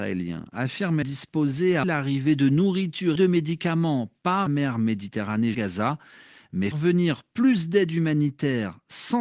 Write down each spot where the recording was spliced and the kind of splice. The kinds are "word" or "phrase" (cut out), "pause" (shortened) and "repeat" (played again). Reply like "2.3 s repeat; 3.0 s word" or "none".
1.0 s word; 1.8 s word; 3.2 s word; 4.5 s word; 5.5 s word; 6.7 s word

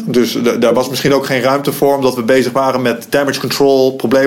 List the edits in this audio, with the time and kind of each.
none

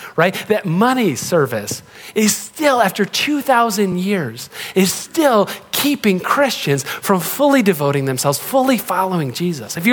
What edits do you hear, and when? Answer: none

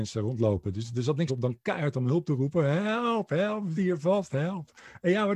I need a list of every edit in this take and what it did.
1.3 s word; 3.8 s word

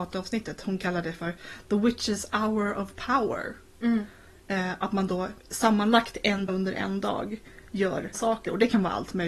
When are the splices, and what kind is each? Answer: 5.4 s pause; 6.5 s word; 8.1 s word

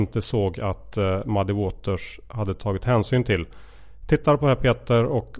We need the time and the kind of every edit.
none

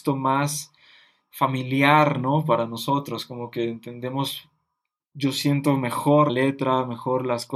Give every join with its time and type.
6.3 s word

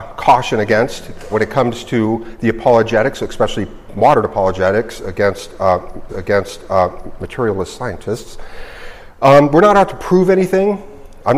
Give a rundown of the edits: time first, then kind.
1.3 s word; 6.1 s repeat

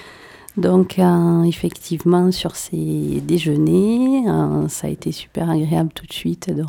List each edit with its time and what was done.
none

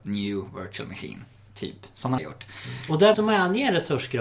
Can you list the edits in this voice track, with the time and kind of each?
2.2 s word; 3.1 s word

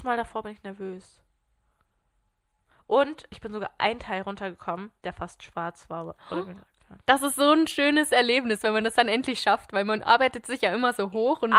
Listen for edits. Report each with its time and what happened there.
5.0 s pause; 7.0 s pause

